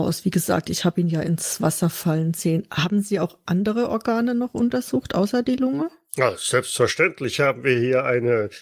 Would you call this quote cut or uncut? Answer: uncut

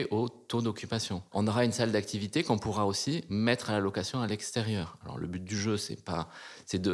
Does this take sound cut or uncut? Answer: uncut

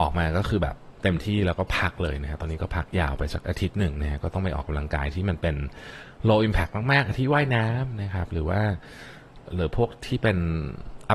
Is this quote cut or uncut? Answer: cut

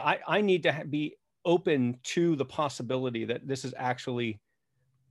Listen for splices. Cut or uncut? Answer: uncut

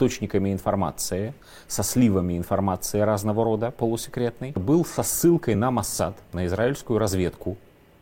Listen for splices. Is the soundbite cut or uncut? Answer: uncut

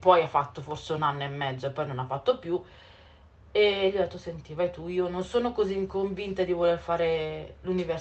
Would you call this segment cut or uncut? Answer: uncut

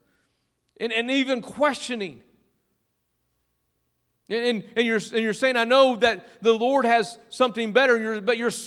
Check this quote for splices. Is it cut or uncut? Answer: uncut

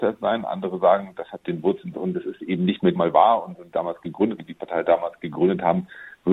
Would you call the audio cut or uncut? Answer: cut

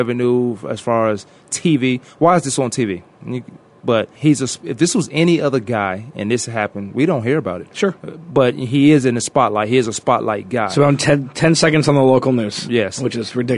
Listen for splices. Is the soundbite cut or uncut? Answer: cut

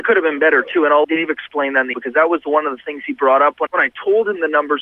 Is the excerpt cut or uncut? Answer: cut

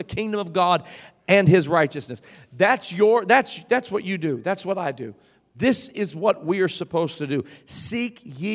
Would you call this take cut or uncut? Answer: uncut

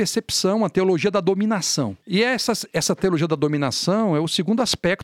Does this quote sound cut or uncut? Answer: uncut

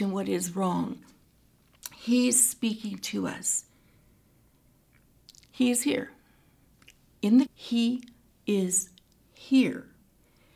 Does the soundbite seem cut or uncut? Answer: cut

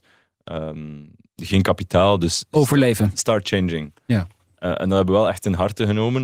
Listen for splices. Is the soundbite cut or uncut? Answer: uncut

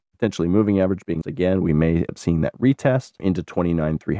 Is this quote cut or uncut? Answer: cut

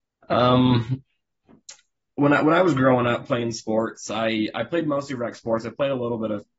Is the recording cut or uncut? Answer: uncut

